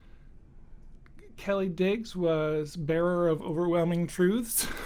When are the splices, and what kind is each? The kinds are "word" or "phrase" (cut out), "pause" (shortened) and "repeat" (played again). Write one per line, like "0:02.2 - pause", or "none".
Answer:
none